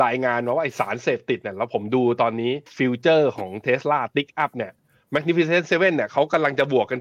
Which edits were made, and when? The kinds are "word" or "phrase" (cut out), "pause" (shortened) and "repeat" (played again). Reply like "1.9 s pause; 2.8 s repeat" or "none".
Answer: 2.7 s pause